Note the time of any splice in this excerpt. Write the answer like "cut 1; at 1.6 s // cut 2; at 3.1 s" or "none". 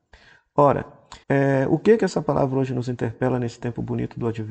cut 1; at 1.2 s